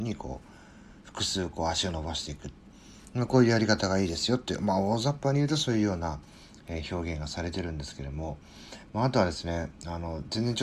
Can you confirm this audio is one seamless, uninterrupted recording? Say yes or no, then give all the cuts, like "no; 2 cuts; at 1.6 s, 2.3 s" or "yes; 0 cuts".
yes; 0 cuts